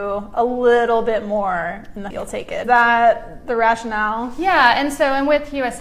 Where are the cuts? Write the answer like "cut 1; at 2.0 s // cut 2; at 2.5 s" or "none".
cut 1; at 2.1 s // cut 2; at 2.6 s